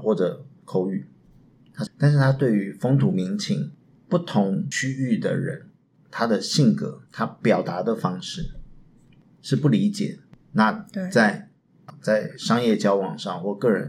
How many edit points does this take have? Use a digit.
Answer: 2